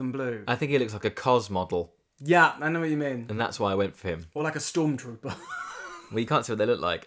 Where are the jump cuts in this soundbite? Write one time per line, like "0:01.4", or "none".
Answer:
none